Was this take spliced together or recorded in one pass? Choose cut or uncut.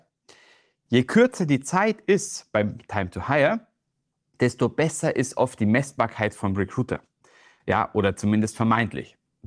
uncut